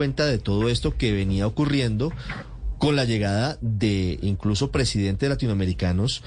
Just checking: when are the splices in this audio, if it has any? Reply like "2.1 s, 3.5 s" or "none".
none